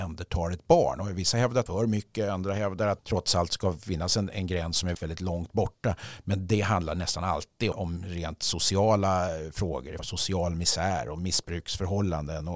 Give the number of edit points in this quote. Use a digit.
6